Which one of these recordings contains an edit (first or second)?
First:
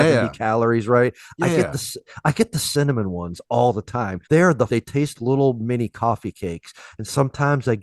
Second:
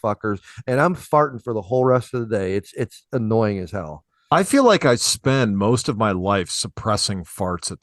first